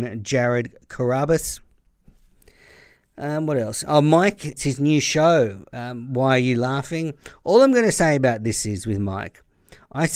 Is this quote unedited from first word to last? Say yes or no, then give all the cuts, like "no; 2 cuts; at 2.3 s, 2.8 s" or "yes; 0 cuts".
no; 1 cut; at 4.6 s